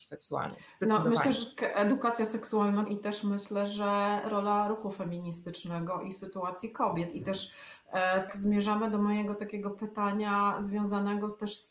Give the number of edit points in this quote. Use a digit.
2